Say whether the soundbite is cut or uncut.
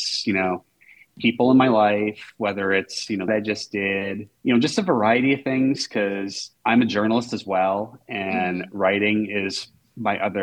cut